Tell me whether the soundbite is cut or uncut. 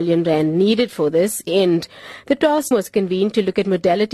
cut